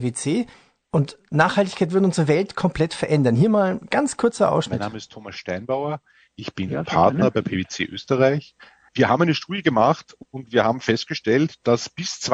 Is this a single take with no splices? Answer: yes; 0 cuts

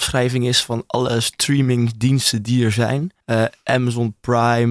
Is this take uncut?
no; 1 cut; at 3.2 s

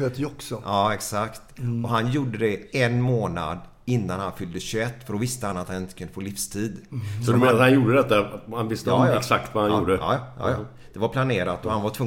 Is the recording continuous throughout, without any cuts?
yes; 0 cuts

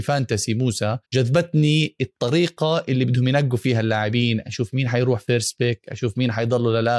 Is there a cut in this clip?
yes; 1 cut; at 1.0 s

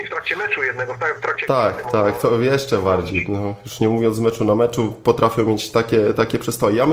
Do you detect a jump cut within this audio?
no; 0 cuts

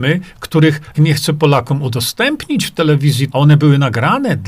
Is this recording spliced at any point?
yes; 2 cuts; at 0.9 s, 3.3 s

